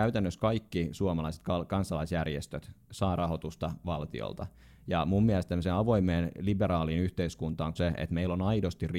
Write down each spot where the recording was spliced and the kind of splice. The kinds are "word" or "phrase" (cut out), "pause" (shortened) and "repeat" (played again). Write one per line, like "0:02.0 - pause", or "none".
0:07.8 - word